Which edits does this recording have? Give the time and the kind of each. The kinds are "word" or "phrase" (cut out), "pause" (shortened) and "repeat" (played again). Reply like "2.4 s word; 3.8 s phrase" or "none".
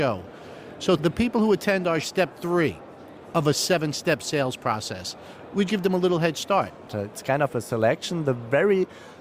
1.0 s phrase; 2.0 s phrase; 5.7 s word